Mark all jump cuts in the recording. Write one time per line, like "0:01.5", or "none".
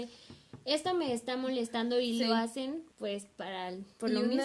0:02.9